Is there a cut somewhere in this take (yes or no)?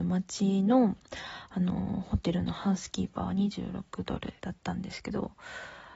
yes